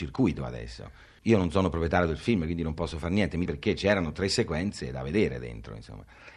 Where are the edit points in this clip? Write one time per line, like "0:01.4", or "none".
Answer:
0:01.2
0:03.4